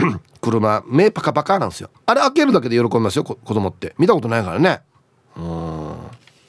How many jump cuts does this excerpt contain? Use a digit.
1